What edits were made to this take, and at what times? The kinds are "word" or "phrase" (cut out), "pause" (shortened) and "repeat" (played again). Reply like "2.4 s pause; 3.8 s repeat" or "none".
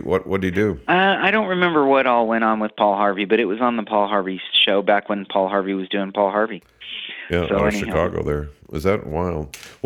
none